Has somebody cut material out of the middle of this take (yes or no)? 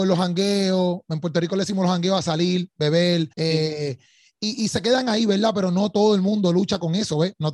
yes